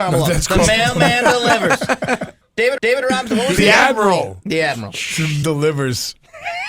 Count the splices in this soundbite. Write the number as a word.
three